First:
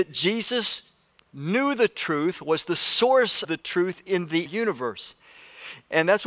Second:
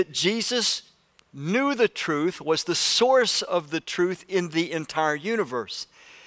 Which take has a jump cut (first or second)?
first